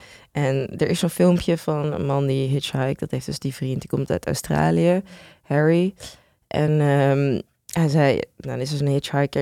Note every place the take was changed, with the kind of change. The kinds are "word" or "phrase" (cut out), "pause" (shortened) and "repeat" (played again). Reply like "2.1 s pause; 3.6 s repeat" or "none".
none